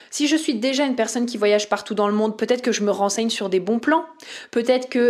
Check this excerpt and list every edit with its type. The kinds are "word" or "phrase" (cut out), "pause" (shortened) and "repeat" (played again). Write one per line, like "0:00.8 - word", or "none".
none